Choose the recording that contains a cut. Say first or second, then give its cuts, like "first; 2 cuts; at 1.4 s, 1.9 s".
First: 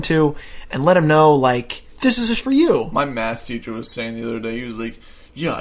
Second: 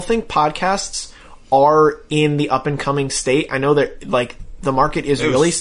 first; 2 cuts; at 1.9 s, 2.4 s